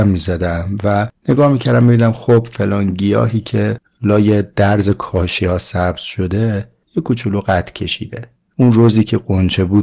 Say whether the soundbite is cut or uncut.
uncut